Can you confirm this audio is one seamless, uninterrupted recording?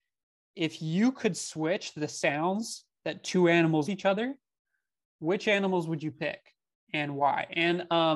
no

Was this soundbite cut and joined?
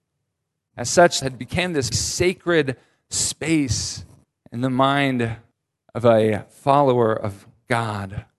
yes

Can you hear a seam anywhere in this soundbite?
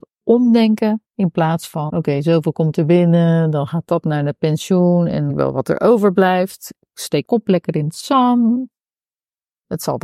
yes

